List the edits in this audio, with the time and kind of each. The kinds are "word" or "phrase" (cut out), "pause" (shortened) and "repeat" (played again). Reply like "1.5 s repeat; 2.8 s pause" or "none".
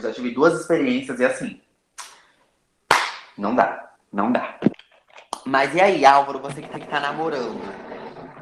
6.7 s repeat